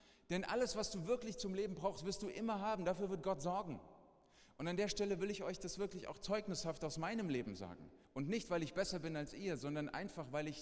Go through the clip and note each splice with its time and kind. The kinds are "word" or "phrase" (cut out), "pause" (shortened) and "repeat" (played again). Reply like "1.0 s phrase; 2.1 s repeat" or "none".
8.0 s pause

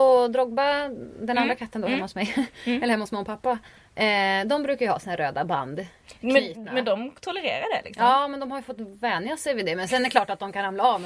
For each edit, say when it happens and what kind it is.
none

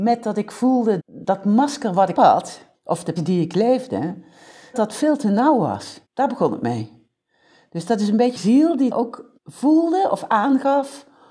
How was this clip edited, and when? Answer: 1.0 s word; 2.2 s word; 2.7 s pause; 3.2 s word; 4.7 s word; 6.1 s pause; 8.4 s word; 8.9 s word; 9.4 s pause

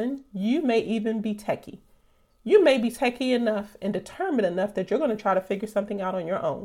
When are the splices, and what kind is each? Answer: none

